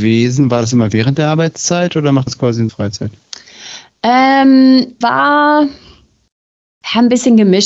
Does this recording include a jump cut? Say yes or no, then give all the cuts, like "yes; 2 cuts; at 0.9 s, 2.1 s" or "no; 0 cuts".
yes; 3 cuts; at 2.3 s, 2.7 s, 5.0 s